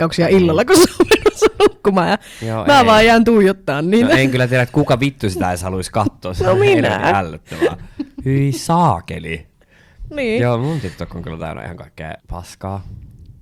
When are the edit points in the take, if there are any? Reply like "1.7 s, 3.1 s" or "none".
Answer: 12.2 s

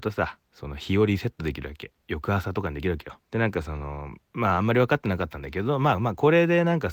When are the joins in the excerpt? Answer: 3.2 s, 4.2 s

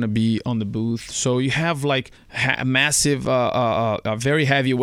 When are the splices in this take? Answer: 2.2 s

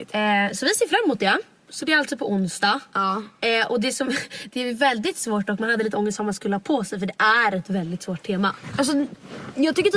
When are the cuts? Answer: none

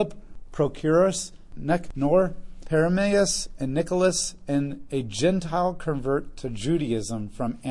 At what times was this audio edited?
2.6 s

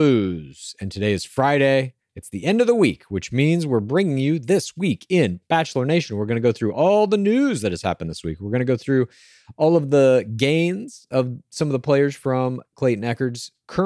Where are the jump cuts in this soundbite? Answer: none

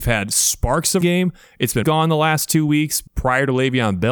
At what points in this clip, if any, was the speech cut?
1.0 s, 1.8 s, 3.1 s

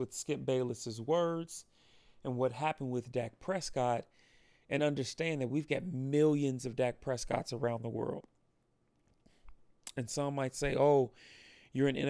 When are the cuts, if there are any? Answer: none

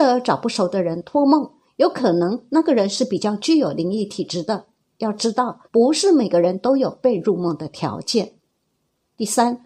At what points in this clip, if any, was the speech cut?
5.6 s

